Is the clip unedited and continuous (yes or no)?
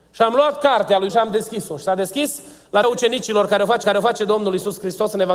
no